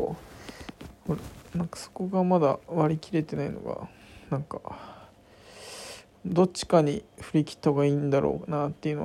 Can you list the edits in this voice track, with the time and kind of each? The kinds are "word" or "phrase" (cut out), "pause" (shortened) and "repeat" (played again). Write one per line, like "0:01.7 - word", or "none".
0:07.1 - pause